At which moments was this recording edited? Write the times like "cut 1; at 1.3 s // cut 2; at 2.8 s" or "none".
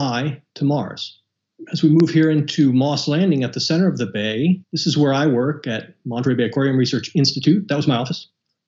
cut 1; at 4.6 s